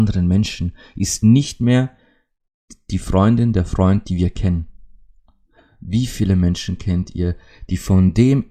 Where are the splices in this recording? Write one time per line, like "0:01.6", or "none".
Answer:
none